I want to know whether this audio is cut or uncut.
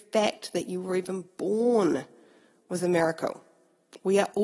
uncut